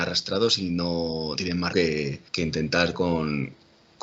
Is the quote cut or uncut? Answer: cut